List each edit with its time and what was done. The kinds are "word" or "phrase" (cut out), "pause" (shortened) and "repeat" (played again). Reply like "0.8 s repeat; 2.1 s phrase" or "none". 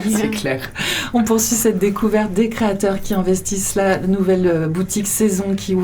none